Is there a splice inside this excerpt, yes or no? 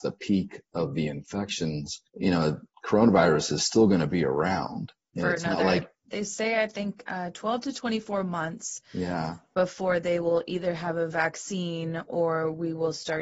yes